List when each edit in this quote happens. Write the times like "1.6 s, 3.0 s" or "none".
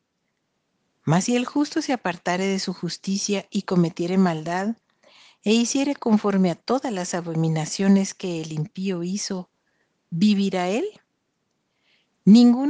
none